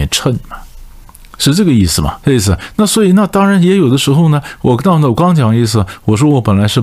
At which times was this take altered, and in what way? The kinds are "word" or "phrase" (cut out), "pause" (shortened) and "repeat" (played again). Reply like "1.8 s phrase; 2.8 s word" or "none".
1.1 s pause; 2.2 s pause